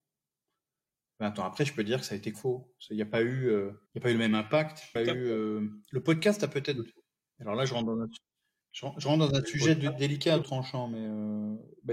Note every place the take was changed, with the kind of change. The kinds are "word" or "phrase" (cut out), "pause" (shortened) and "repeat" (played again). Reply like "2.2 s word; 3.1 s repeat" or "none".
2.3 s word; 3.9 s pause; 5.0 s phrase; 8.6 s pause; 10.4 s word